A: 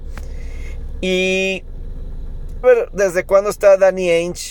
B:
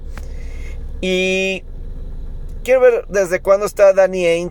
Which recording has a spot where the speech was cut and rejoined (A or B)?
A